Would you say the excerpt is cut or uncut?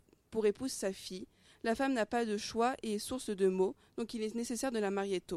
uncut